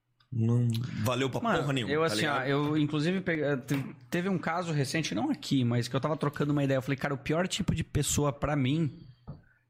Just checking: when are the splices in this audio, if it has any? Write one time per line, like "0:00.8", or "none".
none